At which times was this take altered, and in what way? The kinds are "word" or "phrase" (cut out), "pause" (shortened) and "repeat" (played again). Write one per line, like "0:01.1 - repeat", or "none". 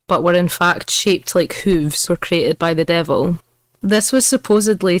0:02.1 - word